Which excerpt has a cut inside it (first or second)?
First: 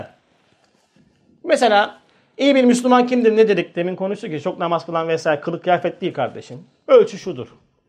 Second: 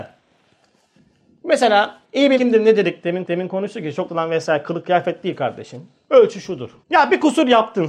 second